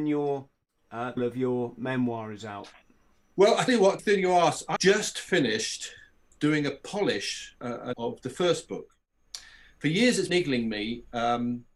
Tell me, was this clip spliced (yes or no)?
yes